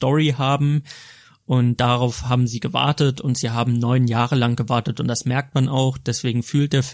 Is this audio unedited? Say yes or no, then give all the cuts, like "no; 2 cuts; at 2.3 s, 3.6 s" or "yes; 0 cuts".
yes; 0 cuts